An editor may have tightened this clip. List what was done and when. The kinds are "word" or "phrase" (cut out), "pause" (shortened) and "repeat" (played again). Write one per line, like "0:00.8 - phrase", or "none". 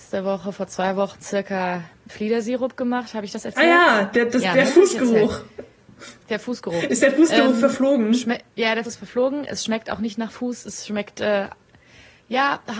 0:02.1 - word
0:06.2 - pause
0:08.5 - pause
0:08.9 - word